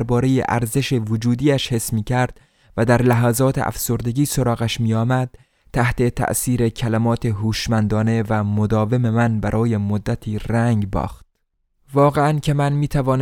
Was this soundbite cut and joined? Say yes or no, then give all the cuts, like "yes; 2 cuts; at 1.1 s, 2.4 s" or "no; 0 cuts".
no; 0 cuts